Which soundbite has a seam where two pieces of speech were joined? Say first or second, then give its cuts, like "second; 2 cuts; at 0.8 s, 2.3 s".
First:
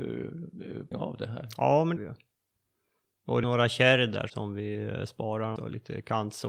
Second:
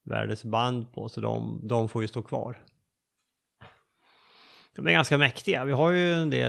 first; 5 cuts; at 0.9 s, 2.0 s, 3.4 s, 4.3 s, 5.6 s